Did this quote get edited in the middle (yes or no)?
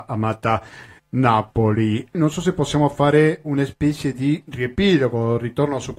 yes